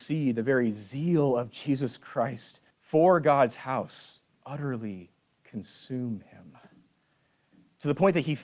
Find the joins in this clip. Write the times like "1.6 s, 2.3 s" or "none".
2.7 s, 4.3 s